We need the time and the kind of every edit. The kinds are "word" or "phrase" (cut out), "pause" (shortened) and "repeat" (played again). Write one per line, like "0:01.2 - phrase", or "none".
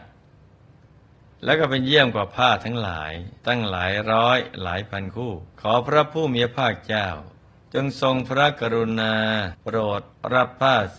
0:03.4 - pause
0:05.5 - pause
0:07.6 - pause
0:09.6 - pause